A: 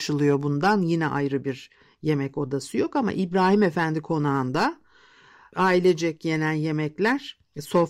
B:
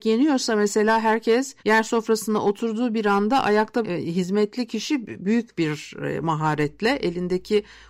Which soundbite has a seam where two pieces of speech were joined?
B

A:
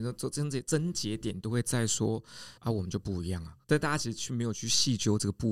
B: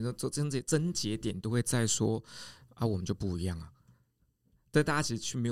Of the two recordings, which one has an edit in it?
A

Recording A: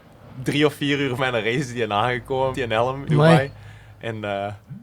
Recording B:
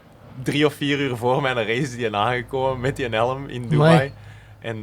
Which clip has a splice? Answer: A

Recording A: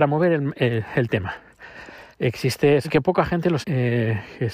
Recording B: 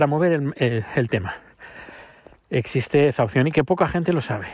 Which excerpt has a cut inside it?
A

